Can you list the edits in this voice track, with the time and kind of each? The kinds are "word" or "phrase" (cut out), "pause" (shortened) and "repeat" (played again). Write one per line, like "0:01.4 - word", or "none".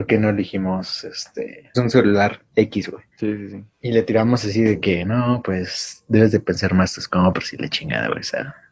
0:01.7 - word
0:03.1 - pause